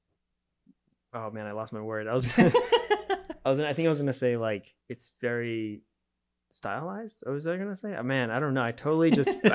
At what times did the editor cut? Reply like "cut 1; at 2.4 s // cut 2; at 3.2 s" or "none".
cut 1; at 4.8 s